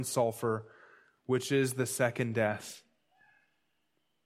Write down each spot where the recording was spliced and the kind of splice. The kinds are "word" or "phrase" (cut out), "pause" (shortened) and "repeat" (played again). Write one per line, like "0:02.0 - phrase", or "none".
none